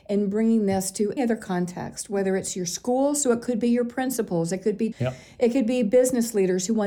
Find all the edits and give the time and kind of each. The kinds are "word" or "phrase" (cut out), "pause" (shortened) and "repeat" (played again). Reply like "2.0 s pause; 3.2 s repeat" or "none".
1.2 s word; 4.9 s word